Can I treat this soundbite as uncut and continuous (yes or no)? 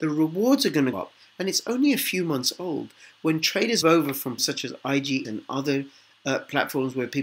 no